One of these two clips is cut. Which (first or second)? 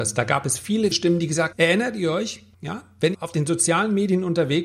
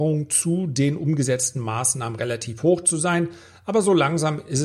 first